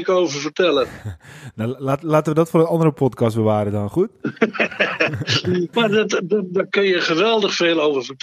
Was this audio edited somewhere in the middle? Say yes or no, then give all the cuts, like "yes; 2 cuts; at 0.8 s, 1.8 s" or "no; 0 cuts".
yes; 1 cut; at 5.7 s